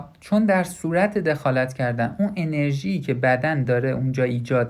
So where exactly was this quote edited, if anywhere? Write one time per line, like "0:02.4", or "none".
none